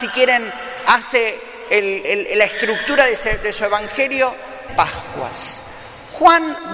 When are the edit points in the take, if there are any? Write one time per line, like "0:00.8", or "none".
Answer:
0:02.0
0:04.7